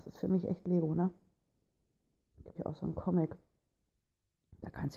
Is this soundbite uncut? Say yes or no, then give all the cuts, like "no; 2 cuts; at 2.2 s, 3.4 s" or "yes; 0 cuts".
no; 1 cut; at 2.5 s